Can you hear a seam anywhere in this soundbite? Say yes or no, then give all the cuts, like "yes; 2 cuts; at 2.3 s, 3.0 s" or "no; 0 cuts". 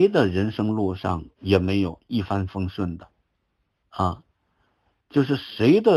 yes; 1 cut; at 1.3 s